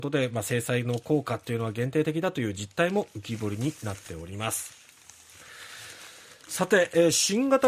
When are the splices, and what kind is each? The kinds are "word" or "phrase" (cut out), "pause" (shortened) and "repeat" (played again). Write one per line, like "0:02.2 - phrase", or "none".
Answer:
none

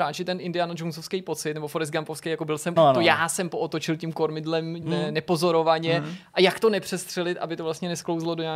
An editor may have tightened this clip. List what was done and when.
0:02.8 - phrase
0:04.8 - word

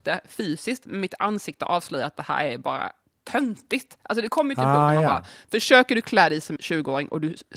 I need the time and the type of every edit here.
0:03.0 - pause
0:06.6 - word

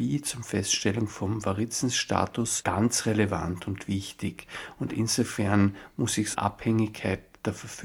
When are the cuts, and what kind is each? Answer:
none

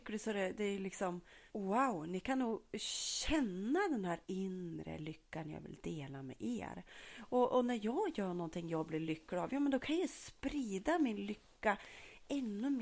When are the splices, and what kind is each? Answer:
0:01.5 - pause
0:04.2 - pause

